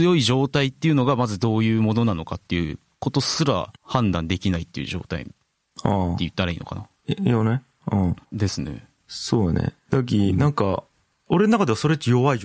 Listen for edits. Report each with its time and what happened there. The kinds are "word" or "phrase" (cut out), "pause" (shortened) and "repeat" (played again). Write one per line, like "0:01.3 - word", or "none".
0:03.8 - pause
0:07.0 - pause
0:08.2 - pause

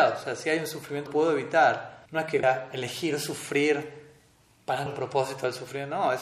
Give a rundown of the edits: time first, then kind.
0:01.1 - word
0:02.1 - pause
0:02.4 - word
0:04.9 - word

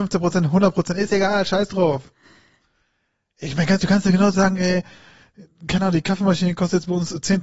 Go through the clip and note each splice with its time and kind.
0:03.8 - word
0:04.3 - word

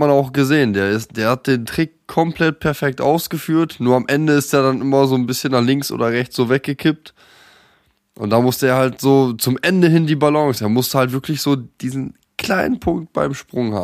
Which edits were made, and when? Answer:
none

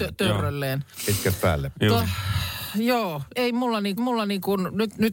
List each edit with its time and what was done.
0:02.0 - word
0:03.3 - word
0:04.0 - repeat

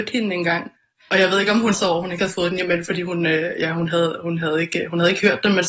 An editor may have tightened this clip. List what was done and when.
0:01.7 - word

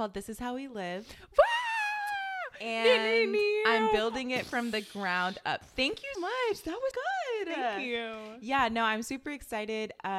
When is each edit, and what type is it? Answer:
0:06.1 - word
0:06.9 - word

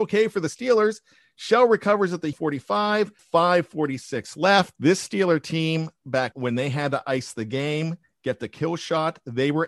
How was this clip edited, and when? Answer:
0:02.3 - word
0:03.2 - word
0:06.3 - word

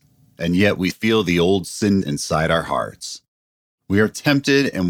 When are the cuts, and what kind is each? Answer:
0:00.9 - word
0:02.0 - phrase

